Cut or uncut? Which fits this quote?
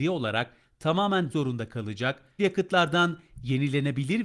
cut